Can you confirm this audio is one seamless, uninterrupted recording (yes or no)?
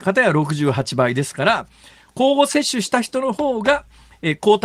yes